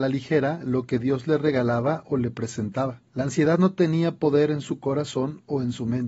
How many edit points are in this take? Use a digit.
1